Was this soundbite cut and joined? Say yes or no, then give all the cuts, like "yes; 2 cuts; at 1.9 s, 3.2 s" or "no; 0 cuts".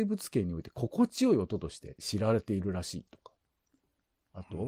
no; 0 cuts